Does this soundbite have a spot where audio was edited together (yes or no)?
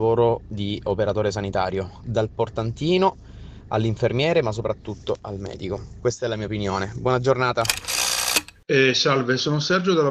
no